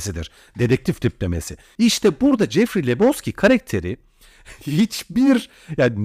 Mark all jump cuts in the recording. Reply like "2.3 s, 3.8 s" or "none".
none